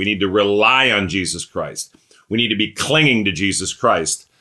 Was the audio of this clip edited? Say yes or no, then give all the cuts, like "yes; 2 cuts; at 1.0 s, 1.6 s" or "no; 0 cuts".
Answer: no; 0 cuts